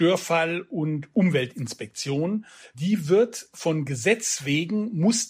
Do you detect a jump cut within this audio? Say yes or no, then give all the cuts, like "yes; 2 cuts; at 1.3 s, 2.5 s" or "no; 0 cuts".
no; 0 cuts